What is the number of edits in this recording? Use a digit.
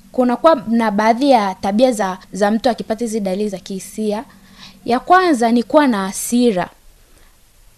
1